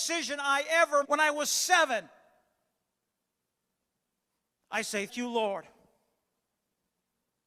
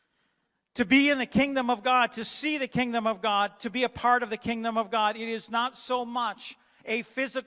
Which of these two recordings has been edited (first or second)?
first